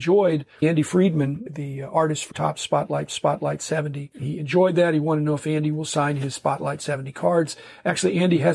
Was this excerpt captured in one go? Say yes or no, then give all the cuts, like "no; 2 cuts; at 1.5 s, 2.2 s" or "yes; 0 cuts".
no; 2 cuts; at 2.3 s, 3.1 s